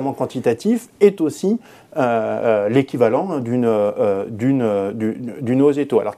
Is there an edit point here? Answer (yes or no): no